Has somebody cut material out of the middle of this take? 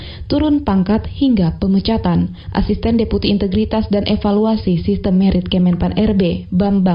no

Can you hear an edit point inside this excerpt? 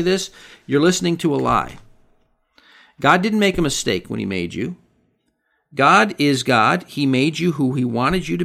no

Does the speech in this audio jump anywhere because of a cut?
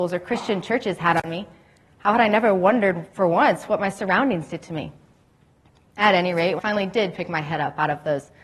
yes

